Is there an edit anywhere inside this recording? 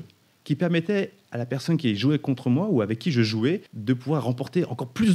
yes; 1 cut; at 3.7 s

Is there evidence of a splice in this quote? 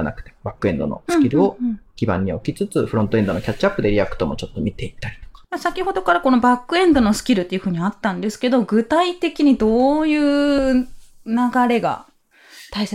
yes; 2 cuts; at 1.9 s, 5.4 s

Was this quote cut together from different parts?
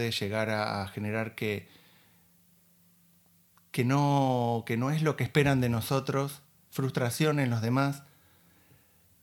no; 0 cuts

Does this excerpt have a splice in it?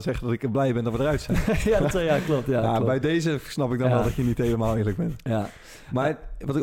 no; 0 cuts

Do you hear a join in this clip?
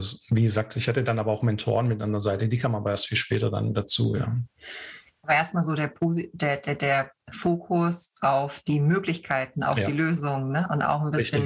no; 0 cuts

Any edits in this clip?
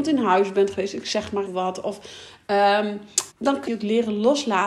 yes; 3 cuts; at 1.5 s, 3.3 s, 3.7 s

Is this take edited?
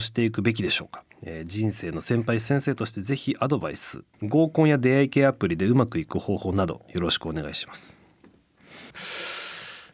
yes; 3 cuts; at 1.1 s, 4.1 s, 8.9 s

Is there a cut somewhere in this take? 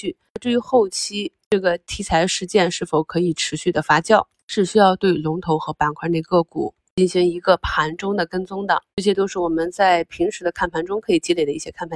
yes; 1 cut; at 8.9 s

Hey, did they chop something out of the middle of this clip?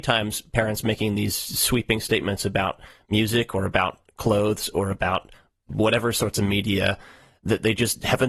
no; 0 cuts

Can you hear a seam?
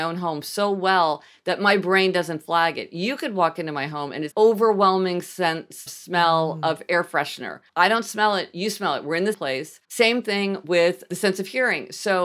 yes; 5 cuts; at 4.3 s, 5.9 s, 7.7 s, 9.3 s, 9.8 s

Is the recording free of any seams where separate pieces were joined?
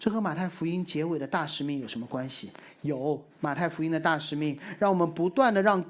no; 1 cut; at 3.3 s

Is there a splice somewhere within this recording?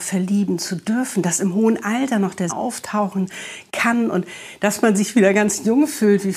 yes; 1 cut; at 2.5 s

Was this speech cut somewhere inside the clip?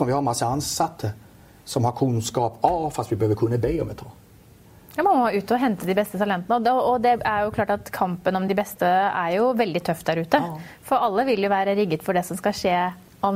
no; 0 cuts

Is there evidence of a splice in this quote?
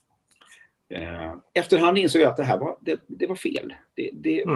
yes; 1 cut; at 1.5 s

